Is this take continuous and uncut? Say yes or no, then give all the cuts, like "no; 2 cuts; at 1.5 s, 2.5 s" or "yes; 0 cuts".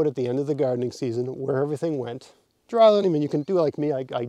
yes; 0 cuts